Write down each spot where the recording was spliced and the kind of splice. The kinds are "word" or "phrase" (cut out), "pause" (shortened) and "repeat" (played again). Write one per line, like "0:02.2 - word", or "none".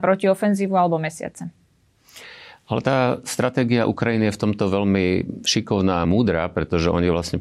none